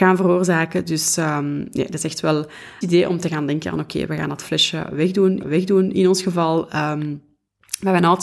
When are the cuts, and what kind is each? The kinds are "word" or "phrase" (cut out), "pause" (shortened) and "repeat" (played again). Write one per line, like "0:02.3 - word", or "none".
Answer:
0:02.8 - phrase
0:05.4 - repeat